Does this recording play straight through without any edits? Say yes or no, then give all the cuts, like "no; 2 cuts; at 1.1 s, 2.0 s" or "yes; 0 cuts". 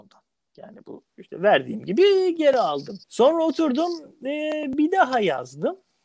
no; 2 cuts; at 1.1 s, 3.0 s